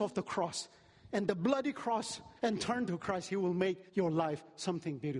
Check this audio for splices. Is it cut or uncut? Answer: cut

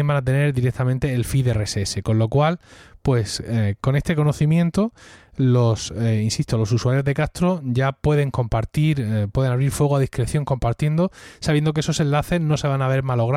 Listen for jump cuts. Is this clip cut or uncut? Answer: uncut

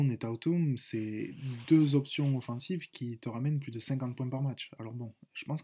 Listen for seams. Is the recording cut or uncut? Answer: uncut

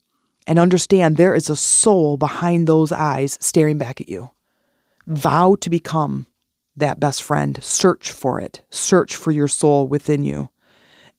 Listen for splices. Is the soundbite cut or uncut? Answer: uncut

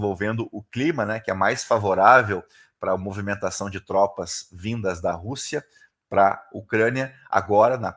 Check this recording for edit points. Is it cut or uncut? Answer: uncut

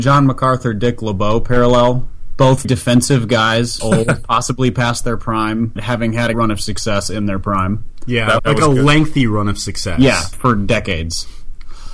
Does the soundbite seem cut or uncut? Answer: cut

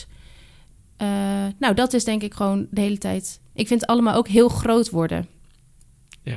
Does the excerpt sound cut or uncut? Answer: uncut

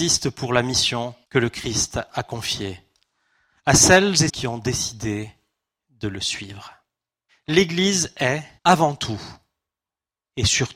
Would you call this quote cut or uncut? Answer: cut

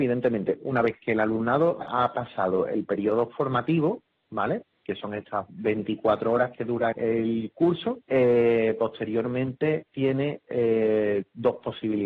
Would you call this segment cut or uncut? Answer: cut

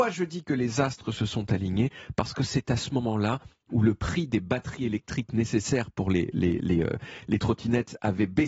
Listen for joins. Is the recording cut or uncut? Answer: uncut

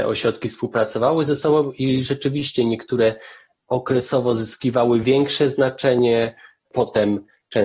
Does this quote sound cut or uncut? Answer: uncut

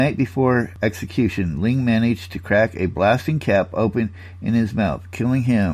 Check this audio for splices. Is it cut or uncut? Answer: uncut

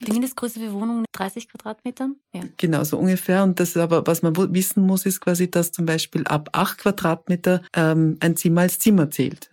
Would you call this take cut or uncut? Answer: cut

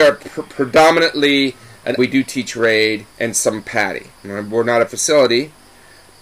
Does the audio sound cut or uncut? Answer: cut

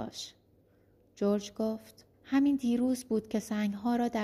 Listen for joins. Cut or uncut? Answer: cut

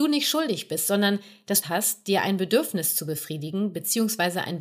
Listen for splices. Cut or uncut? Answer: cut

